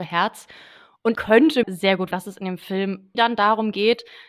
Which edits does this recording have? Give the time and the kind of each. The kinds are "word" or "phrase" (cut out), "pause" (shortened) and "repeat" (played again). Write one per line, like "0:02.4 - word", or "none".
0:01.1 - word
0:01.6 - word
0:02.1 - word
0:03.1 - word